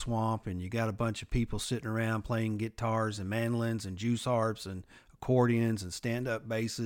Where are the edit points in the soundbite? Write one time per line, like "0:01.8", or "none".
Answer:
none